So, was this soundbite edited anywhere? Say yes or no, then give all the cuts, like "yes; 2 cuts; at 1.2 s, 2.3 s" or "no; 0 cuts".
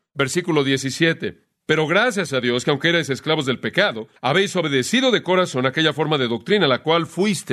yes; 1 cut; at 4.2 s